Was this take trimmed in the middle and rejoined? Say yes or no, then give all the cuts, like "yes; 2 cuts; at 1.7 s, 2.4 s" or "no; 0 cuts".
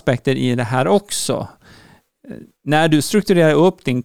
no; 0 cuts